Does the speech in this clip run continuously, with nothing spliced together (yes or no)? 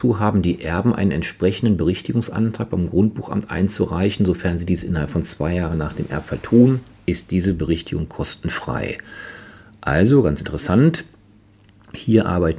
yes